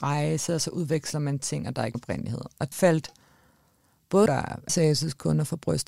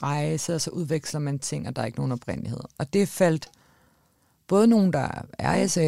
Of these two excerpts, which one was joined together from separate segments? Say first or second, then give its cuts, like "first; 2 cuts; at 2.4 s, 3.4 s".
first; 4 cuts; at 1.9 s, 2.7 s, 4.3 s, 4.7 s